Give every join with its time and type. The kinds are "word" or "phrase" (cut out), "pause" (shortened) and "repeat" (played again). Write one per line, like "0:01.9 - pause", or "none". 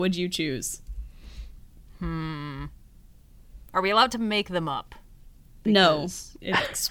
none